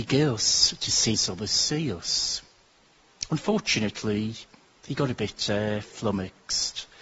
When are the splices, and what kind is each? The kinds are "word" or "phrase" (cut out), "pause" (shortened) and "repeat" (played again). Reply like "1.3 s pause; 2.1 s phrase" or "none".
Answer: 1.1 s word